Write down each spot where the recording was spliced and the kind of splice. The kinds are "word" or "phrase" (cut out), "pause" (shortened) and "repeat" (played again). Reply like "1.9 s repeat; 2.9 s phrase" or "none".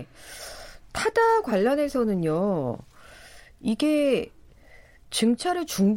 none